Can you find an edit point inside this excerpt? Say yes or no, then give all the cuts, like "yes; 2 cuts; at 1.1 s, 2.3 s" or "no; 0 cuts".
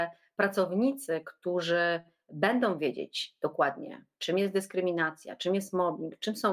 no; 0 cuts